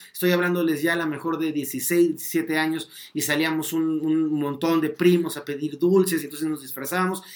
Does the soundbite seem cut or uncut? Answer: uncut